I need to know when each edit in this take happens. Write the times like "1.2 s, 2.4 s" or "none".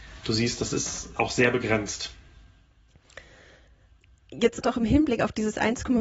1.2 s, 4.6 s